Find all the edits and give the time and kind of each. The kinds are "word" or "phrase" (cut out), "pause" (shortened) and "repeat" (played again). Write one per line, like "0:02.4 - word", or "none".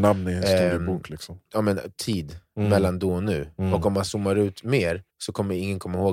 0:01.5 - pause
0:05.1 - pause